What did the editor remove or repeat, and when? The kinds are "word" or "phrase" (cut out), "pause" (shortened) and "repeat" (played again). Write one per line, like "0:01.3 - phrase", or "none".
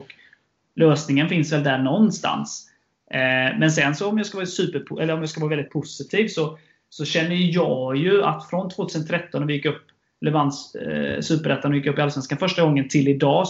none